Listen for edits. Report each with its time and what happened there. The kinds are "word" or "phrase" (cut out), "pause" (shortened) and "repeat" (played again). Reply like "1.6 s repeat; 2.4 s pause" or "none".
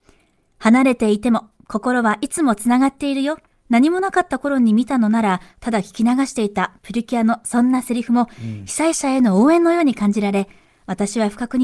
3.5 s pause